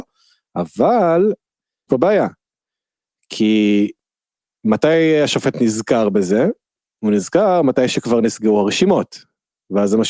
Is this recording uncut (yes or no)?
no